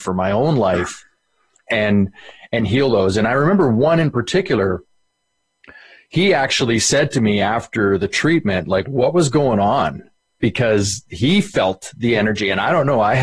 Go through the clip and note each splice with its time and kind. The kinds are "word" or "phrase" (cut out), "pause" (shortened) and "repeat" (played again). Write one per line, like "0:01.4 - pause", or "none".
none